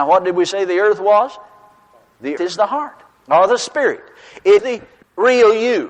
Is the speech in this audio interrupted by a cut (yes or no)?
yes